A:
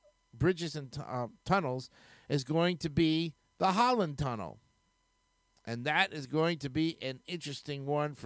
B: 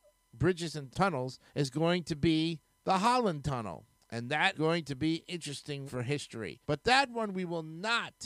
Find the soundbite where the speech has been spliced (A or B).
B